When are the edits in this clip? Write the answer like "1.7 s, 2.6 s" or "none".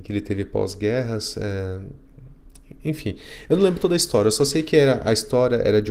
none